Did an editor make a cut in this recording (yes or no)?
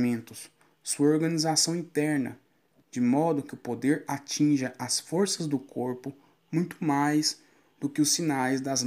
no